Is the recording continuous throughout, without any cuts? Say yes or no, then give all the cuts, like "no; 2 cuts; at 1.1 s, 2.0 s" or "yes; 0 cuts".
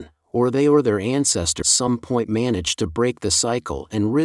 no; 1 cut; at 1.6 s